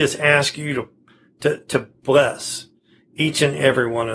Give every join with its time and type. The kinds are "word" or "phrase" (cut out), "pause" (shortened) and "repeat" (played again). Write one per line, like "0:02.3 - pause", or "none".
none